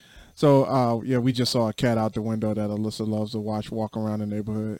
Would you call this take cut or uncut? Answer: uncut